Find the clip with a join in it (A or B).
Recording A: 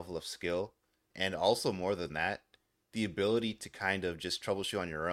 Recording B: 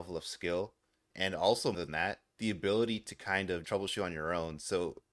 B